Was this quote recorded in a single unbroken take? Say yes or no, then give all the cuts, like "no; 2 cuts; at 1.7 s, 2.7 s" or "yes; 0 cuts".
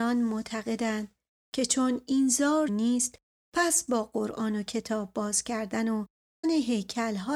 no; 2 cuts; at 2.7 s, 6.4 s